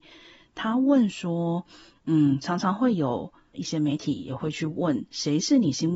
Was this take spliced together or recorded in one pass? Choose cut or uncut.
uncut